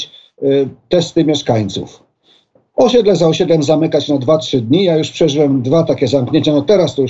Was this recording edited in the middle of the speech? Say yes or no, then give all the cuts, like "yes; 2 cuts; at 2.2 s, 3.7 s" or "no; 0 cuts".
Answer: no; 0 cuts